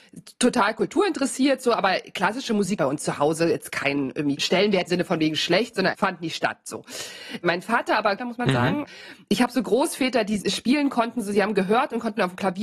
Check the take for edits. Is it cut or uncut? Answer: cut